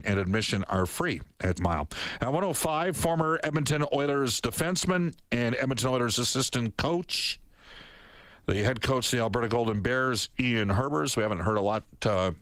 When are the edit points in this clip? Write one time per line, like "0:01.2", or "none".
0:01.5